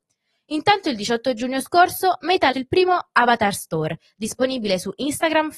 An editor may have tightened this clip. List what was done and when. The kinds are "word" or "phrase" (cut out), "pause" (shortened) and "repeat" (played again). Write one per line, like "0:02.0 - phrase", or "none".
0:02.5 - word